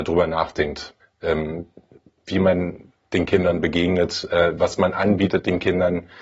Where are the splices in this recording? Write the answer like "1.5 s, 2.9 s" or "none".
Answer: 1.0 s